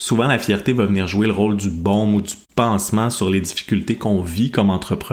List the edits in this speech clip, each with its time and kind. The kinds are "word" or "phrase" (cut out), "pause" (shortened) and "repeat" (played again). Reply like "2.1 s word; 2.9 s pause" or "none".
none